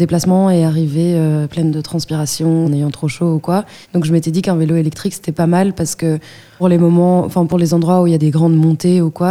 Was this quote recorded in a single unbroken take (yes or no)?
no